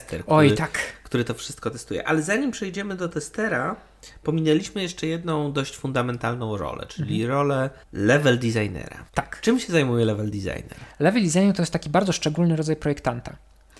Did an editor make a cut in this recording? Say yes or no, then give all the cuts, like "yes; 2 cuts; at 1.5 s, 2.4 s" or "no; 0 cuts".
yes; 2 cuts; at 7.8 s, 9.1 s